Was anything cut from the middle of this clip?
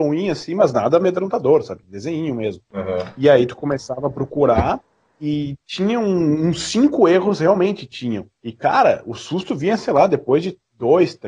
no; 0 cuts

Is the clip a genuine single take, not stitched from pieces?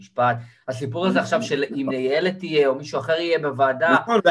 yes; 0 cuts

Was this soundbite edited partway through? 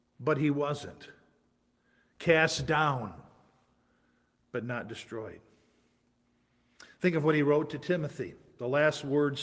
no; 0 cuts

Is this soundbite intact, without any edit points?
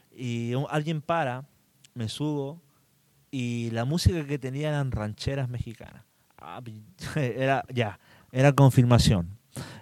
yes; 0 cuts

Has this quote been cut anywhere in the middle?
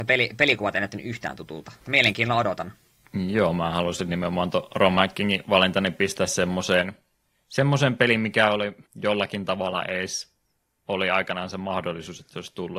yes; 2 cuts; at 1.8 s, 8.9 s

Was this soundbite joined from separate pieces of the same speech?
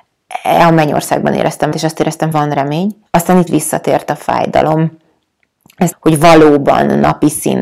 yes; 5 cuts; at 1.7 s, 2.3 s, 3.1 s, 3.5 s, 5.9 s

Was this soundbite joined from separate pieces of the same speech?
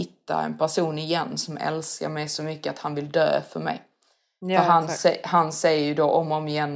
no; 0 cuts

